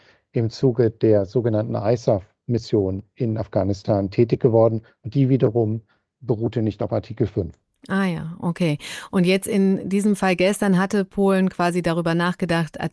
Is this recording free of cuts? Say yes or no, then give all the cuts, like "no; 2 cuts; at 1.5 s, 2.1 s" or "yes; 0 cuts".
yes; 0 cuts